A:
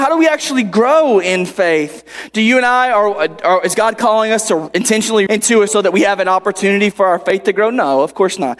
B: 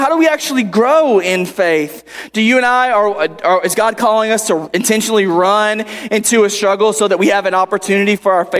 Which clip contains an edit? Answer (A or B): A